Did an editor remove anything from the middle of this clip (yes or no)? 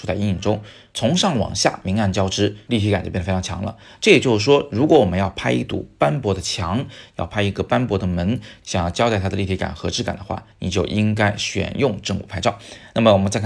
yes